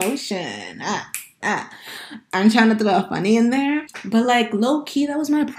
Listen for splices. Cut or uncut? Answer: uncut